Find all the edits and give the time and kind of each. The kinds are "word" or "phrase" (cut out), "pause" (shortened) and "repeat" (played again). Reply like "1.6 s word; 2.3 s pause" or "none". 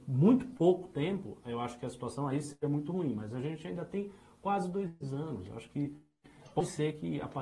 none